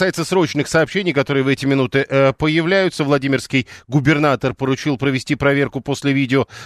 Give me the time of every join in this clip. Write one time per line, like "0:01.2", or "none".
none

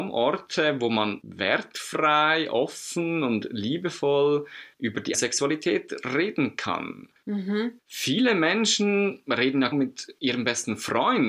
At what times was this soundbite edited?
0:05.1
0:09.7

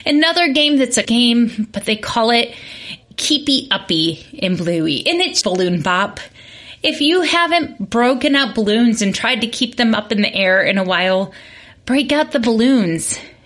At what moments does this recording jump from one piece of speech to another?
0:01.0
0:03.0
0:05.4

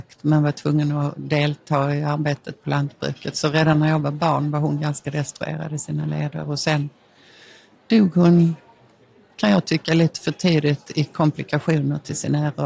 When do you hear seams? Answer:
none

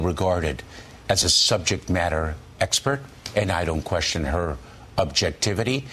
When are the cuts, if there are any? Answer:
none

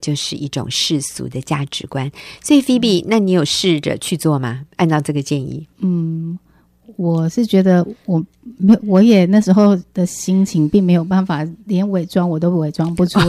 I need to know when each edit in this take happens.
0:05.7

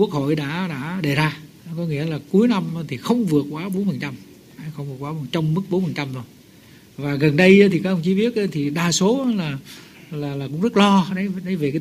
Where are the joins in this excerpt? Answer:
none

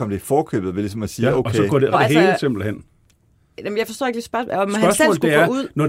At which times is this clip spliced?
0:01.9

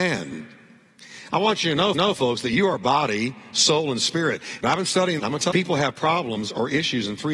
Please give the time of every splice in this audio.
0:01.9
0:05.2
0:05.5

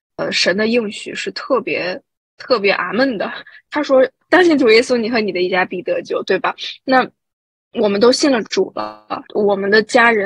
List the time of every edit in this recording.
none

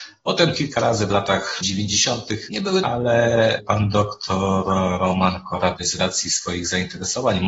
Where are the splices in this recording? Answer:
0:02.8
0:05.8

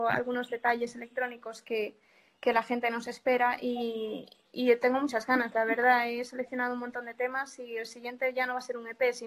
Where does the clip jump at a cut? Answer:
none

